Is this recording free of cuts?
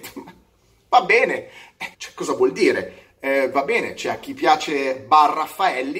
no; 1 cut; at 1.9 s

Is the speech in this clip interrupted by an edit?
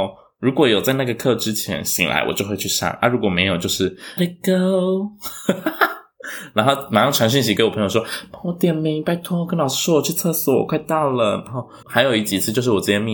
yes; 2 cuts; at 4.2 s, 11.8 s

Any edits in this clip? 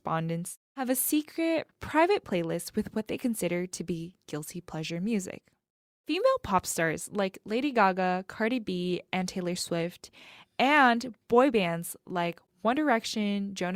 no; 0 cuts

